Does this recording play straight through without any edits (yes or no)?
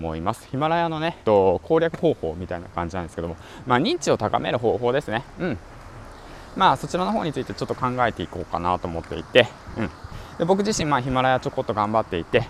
no